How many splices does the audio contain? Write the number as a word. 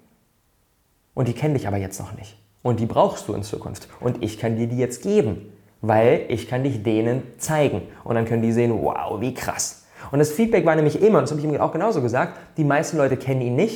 zero